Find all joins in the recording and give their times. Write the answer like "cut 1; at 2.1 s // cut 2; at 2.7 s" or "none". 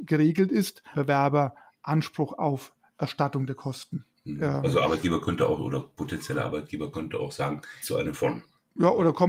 cut 1; at 0.9 s // cut 2; at 4.1 s // cut 3; at 7.8 s // cut 4; at 8.1 s

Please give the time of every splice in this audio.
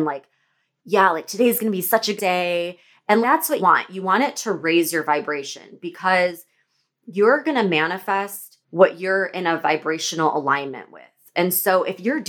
cut 1; at 2.2 s // cut 2; at 3.2 s // cut 3; at 3.6 s // cut 4; at 8.6 s

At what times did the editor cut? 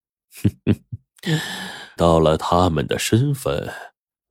cut 1; at 2.0 s

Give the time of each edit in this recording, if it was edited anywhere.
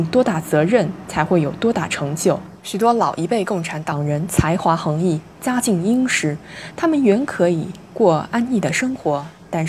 cut 1; at 2.6 s

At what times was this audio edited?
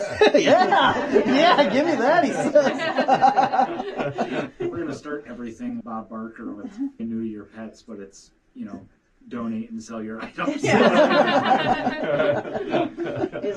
cut 1; at 5.3 s // cut 2; at 5.8 s // cut 3; at 7.0 s

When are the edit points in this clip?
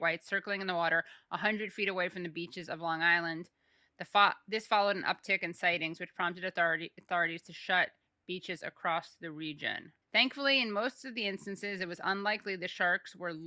cut 1; at 10.0 s

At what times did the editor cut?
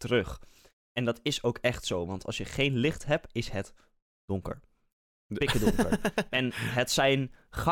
none

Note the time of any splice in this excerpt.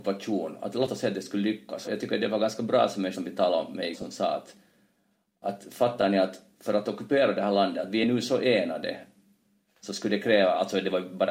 cut 1; at 1.8 s // cut 2; at 3.1 s // cut 3; at 3.9 s

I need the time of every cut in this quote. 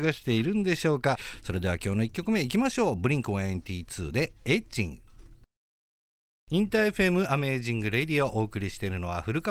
none

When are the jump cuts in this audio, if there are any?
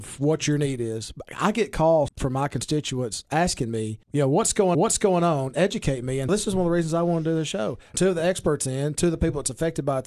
cut 1; at 2.1 s // cut 2; at 4.0 s // cut 3; at 4.7 s // cut 4; at 6.3 s // cut 5; at 7.9 s

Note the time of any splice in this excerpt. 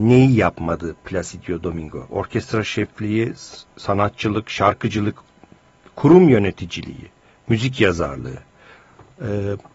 none

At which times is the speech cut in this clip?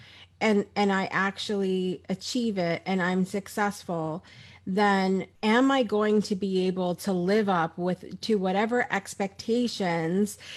cut 1; at 5.3 s

